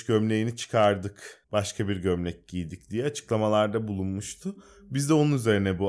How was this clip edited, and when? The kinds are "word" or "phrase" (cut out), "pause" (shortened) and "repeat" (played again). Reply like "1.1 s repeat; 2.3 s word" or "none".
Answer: 1.4 s pause